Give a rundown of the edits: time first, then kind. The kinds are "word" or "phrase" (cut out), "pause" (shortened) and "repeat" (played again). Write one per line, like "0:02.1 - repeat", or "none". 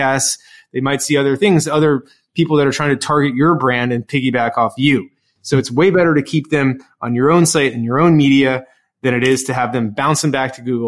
none